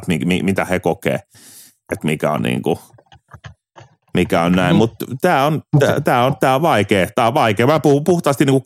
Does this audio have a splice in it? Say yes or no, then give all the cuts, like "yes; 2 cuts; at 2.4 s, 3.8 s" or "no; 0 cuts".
no; 0 cuts